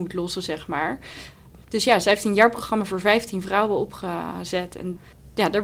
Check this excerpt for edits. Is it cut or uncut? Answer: cut